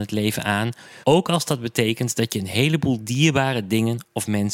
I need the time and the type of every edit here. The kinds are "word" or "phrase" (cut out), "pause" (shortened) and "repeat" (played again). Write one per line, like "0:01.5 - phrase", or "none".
0:01.0 - pause